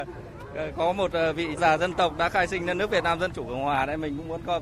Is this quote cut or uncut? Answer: cut